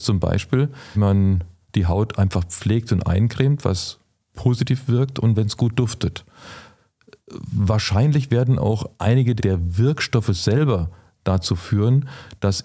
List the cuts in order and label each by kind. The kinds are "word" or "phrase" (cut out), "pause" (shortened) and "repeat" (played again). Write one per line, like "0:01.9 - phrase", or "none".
0:00.9 - word
0:09.4 - word